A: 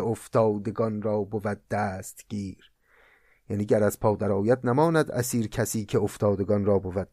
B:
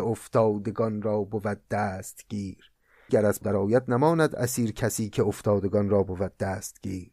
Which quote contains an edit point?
B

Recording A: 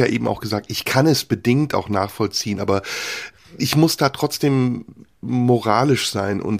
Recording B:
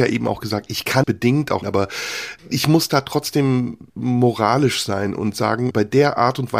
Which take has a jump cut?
B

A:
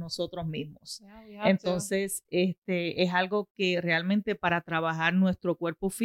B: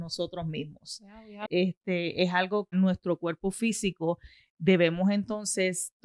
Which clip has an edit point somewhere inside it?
B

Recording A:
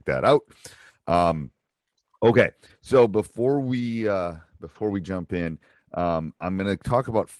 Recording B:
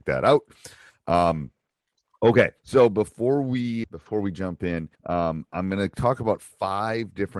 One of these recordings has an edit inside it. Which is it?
B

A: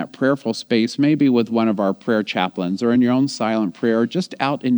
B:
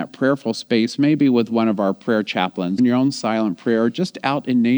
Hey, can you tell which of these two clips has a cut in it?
B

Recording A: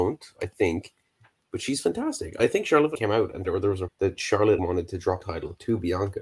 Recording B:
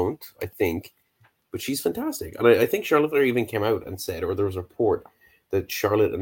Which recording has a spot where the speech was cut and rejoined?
A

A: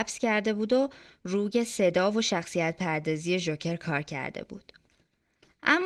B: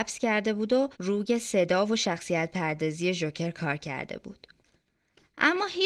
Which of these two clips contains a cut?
B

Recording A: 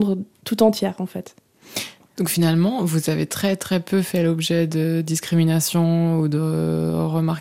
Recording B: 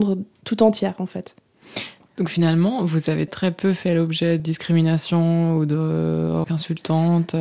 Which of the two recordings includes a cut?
B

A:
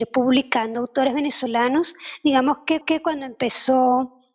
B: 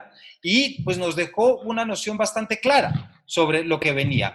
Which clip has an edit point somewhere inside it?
A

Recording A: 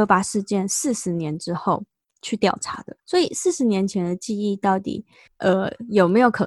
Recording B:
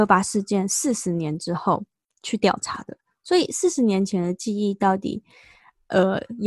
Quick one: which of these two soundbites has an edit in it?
A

